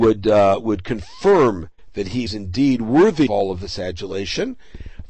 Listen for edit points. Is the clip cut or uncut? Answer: cut